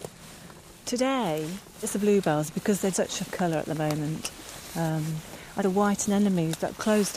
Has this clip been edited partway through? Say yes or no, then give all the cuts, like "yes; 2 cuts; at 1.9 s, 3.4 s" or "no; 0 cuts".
yes; 4 cuts; at 1.8 s, 2.9 s, 3.3 s, 5.6 s